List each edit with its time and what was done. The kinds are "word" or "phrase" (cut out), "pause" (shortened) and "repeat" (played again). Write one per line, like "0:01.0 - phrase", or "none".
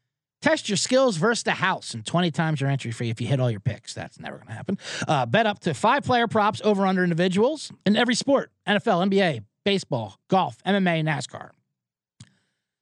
0:07.8 - pause
0:10.2 - pause